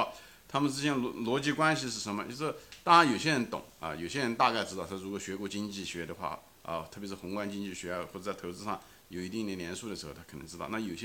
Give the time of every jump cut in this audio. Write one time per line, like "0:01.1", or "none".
none